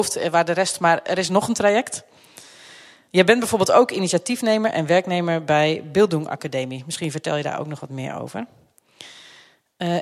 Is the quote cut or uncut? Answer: uncut